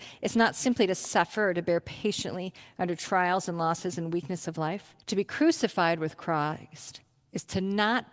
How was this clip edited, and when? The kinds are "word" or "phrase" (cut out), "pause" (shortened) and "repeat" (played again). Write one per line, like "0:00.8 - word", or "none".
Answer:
0:05.0 - pause